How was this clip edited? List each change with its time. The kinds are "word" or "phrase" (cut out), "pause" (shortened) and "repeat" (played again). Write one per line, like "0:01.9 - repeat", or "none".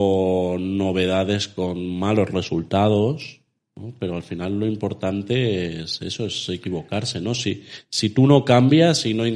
none